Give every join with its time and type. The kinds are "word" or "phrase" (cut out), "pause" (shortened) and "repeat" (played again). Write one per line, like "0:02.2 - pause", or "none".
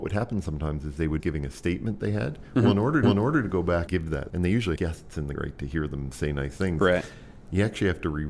0:01.2 - word
0:03.0 - repeat
0:03.9 - word
0:04.3 - word
0:04.8 - word
0:05.3 - word

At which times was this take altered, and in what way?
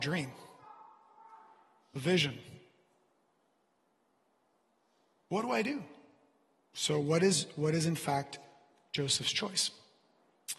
none

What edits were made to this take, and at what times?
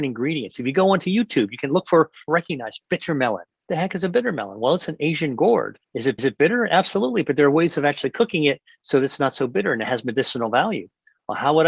0:02.3 - phrase
0:03.5 - pause
0:05.8 - pause
0:06.2 - repeat

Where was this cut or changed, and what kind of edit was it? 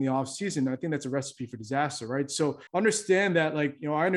0:02.7 - pause

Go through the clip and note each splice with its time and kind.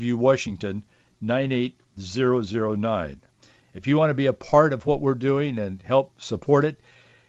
none

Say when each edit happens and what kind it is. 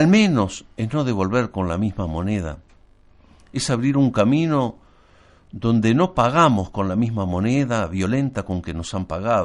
none

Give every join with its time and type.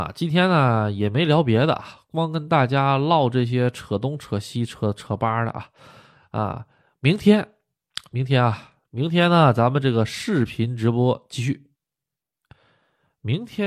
none

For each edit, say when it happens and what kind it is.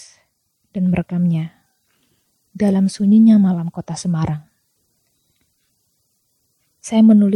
none

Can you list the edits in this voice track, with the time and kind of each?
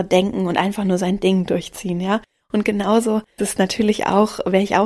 0:03.4 - word

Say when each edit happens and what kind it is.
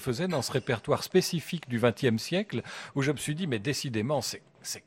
none

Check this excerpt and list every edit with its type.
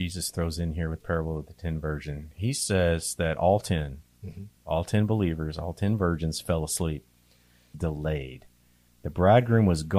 0:01.0 - word
0:04.6 - pause
0:07.7 - phrase

